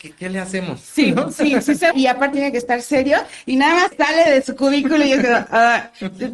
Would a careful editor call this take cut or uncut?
cut